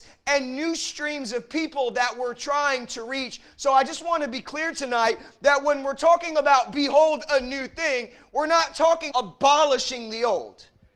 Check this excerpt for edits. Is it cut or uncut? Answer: cut